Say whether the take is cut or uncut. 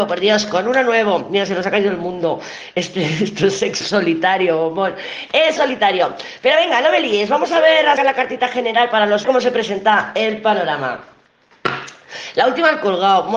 cut